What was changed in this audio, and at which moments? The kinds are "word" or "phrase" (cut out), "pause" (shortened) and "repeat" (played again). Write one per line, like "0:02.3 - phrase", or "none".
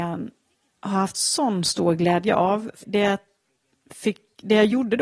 0:02.8 - word